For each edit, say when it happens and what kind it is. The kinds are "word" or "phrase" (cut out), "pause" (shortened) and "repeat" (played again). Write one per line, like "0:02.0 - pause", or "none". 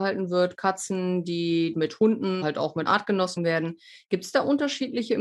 0:01.7 - phrase
0:02.4 - word
0:02.9 - word
0:03.4 - word